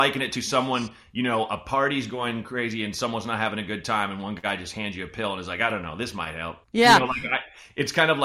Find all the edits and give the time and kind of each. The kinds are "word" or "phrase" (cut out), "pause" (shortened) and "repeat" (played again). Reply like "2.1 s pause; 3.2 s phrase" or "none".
6.6 s pause

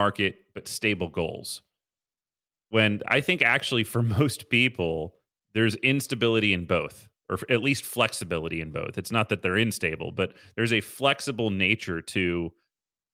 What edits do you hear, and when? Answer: none

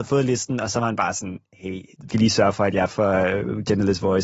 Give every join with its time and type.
2.1 s word

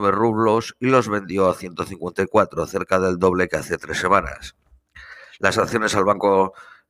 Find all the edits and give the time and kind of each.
none

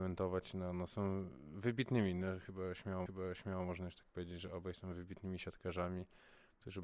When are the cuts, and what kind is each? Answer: 3.1 s repeat

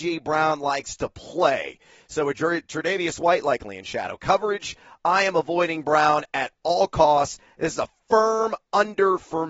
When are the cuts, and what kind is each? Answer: none

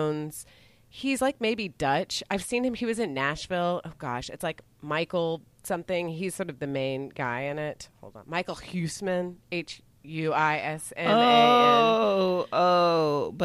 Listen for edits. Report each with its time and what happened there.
none

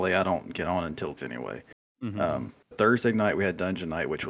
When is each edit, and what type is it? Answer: 1.2 s word; 2.7 s word

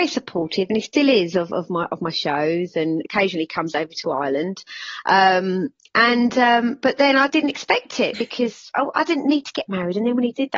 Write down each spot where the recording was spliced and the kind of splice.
7.3 s word

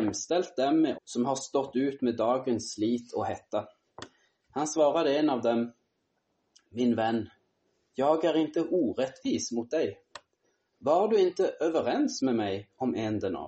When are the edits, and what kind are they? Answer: 0.9 s word

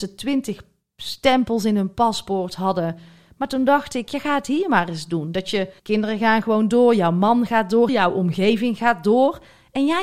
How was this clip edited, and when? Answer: 5.8 s pause; 7.9 s word

